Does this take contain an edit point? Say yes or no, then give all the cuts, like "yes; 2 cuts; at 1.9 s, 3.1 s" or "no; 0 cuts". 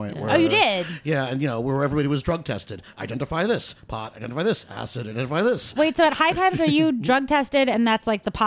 no; 0 cuts